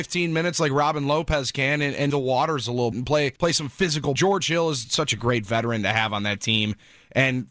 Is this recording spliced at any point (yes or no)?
yes